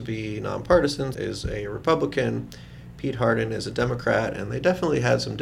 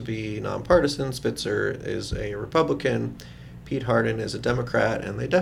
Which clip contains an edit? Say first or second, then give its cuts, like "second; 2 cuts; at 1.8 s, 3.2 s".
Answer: first; 1 cut; at 1.1 s